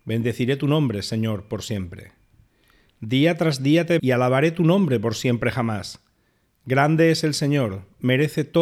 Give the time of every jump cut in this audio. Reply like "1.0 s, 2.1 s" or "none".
4.0 s

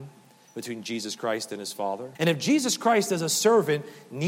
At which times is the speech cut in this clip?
2.1 s

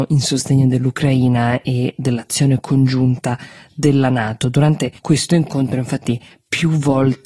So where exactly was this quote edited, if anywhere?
5.0 s

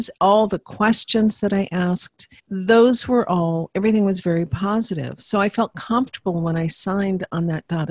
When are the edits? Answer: 2.4 s

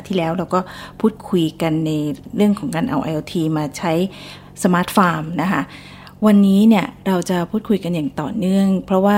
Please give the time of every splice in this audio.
none

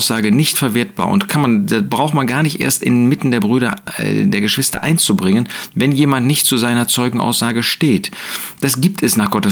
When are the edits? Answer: none

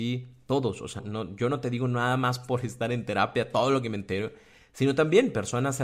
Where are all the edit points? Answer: 1.0 s

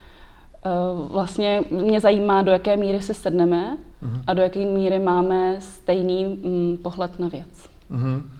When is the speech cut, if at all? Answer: 3.9 s

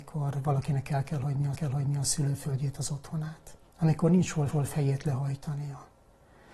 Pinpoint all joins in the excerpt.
1.5 s, 3.7 s, 4.5 s

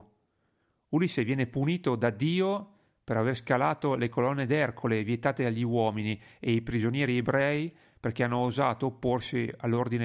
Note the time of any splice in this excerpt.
none

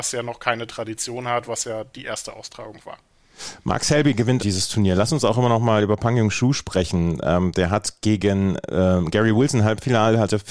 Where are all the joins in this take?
4.4 s

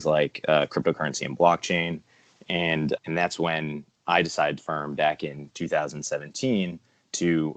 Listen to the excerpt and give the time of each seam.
3.0 s, 4.6 s

